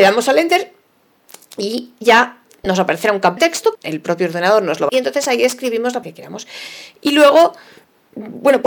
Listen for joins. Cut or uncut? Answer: cut